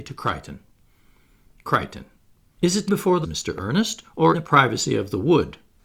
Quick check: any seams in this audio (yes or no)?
yes